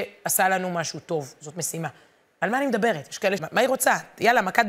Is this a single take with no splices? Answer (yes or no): no